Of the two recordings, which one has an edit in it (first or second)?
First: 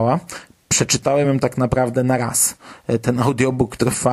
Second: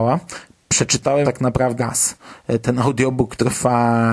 second